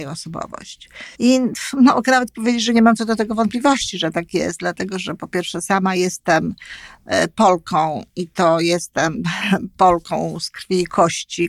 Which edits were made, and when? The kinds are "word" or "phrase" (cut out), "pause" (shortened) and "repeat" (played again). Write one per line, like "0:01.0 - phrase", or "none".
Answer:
0:01.1 - pause